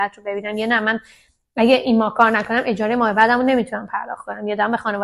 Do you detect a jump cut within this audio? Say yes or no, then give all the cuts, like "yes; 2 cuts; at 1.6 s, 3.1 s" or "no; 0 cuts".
no; 0 cuts